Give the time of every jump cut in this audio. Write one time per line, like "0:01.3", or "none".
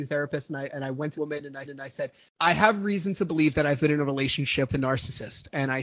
0:01.1
0:01.6
0:04.7